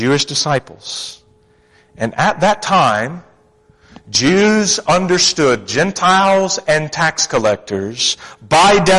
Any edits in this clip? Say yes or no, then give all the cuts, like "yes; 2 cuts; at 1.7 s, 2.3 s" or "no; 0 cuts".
no; 0 cuts